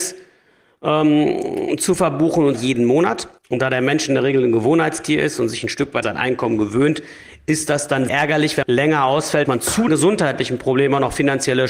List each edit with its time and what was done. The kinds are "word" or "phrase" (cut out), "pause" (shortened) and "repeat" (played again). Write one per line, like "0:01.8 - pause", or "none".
0:02.5 - word
0:03.4 - pause
0:06.0 - word
0:08.1 - word
0:08.6 - word
0:09.4 - word
0:09.9 - word

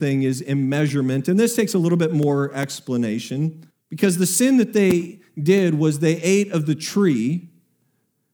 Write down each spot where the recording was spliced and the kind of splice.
0:03.7 - pause

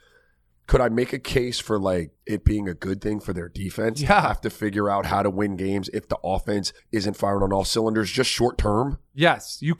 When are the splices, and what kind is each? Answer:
0:02.2 - pause
0:06.8 - pause

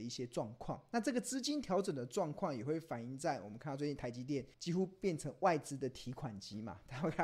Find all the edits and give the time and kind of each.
0:04.5 - pause

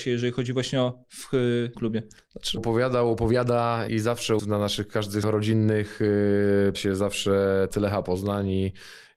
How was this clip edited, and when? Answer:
0:01.0 - word
0:01.7 - word
0:02.6 - word
0:03.9 - word
0:04.4 - word
0:05.2 - word
0:06.7 - word
0:07.7 - word

